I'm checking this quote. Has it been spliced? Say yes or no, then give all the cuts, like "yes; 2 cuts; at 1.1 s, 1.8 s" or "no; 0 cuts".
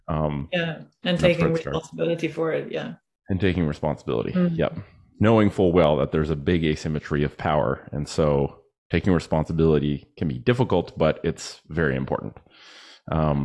no; 0 cuts